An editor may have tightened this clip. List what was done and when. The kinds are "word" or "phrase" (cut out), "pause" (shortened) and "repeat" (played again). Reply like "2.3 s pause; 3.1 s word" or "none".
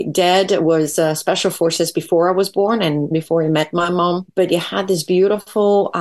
3.1 s word